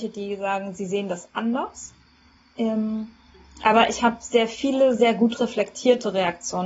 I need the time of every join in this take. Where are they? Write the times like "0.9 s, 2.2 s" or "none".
none